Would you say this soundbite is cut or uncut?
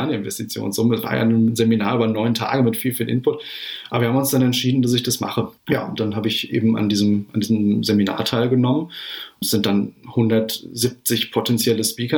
cut